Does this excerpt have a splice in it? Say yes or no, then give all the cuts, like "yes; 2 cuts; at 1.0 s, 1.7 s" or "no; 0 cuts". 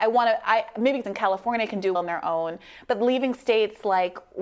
yes; 2 cuts; at 1.0 s, 1.9 s